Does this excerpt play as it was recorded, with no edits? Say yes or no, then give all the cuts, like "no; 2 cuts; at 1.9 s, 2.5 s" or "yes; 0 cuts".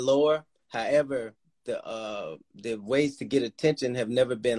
yes; 0 cuts